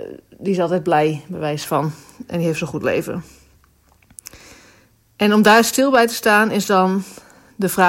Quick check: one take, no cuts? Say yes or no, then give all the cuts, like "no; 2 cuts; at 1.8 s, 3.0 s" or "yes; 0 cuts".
yes; 0 cuts